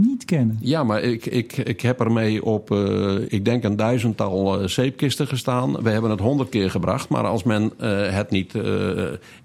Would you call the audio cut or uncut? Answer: cut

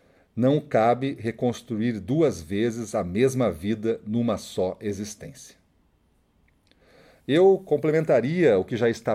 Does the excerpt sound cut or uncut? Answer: uncut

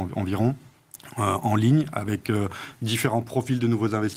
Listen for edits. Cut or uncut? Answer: uncut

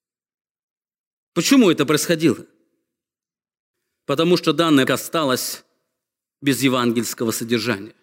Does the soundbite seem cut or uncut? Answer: cut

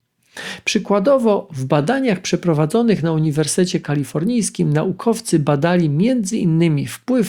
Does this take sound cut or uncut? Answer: uncut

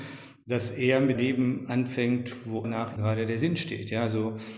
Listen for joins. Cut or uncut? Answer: cut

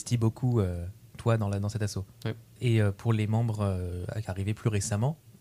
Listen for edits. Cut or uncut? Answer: cut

